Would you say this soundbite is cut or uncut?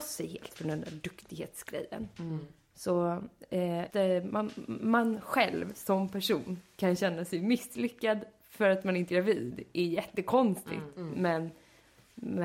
cut